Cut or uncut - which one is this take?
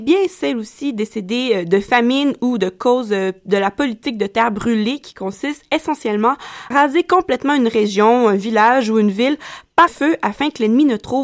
cut